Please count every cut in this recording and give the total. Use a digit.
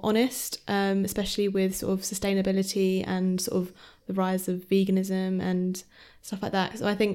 0